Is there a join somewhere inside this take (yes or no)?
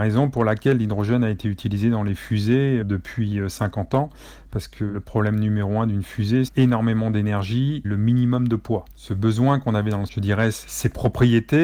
yes